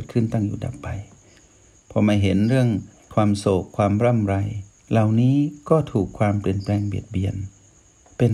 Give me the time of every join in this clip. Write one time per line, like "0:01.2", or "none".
none